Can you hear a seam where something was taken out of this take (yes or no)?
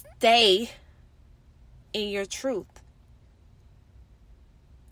yes